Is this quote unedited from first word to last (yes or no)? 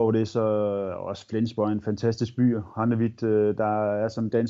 yes